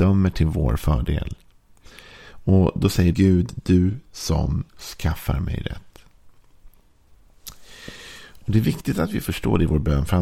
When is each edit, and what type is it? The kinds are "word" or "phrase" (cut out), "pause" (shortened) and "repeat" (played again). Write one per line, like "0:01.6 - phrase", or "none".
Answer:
0:03.1 - word
0:04.7 - pause